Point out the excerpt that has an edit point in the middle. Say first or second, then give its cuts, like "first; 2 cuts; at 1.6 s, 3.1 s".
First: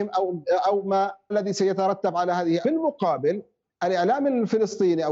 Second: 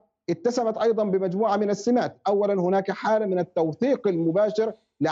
first; 2 cuts; at 1.3 s, 2.6 s